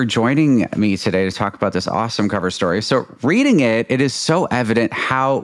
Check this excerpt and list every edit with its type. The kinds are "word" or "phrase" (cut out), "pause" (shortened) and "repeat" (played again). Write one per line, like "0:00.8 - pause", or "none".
none